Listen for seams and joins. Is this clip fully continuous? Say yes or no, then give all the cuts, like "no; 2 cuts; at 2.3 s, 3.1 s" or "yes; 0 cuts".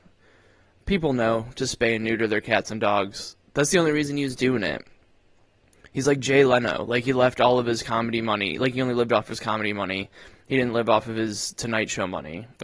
yes; 0 cuts